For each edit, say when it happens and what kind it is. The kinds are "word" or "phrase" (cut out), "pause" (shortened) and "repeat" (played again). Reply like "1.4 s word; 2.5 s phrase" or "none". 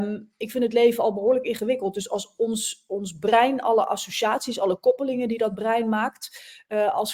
none